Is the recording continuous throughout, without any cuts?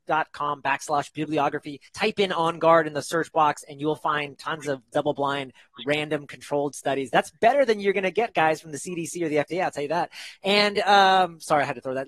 no; 1 cut; at 1.9 s

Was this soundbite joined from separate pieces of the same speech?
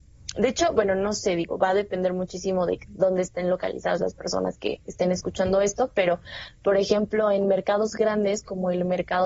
no; 0 cuts

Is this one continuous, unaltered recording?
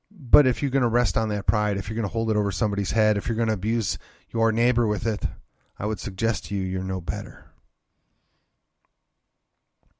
yes; 0 cuts

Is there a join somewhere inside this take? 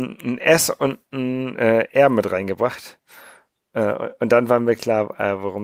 no; 0 cuts

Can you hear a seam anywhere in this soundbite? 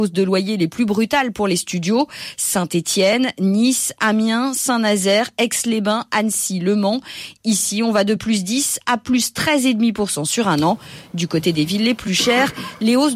no; 0 cuts

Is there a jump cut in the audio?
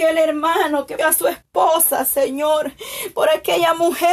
yes; 1 cut; at 1.0 s

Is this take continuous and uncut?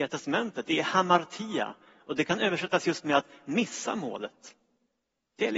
yes; 0 cuts

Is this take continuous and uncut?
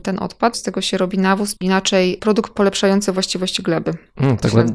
yes; 0 cuts

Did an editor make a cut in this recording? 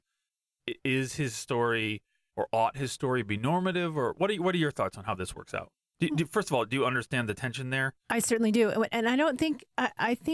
no; 0 cuts

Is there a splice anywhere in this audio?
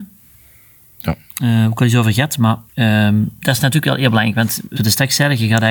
yes; 2 cuts; at 2.7 s, 4.8 s

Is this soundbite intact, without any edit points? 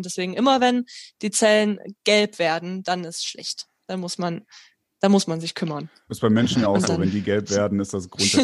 yes; 0 cuts

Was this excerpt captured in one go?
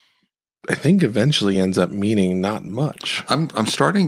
yes; 0 cuts

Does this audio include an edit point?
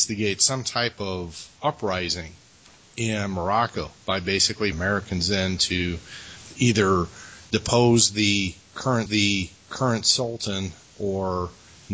yes; 3 cuts; at 1.5 s, 4.7 s, 9.1 s

